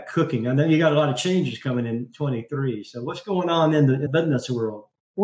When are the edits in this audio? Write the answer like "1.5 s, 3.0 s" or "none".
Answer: 4.1 s